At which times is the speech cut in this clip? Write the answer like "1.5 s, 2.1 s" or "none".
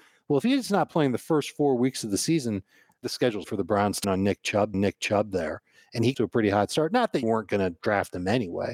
3.0 s, 3.4 s, 4.0 s, 4.7 s, 6.1 s, 7.2 s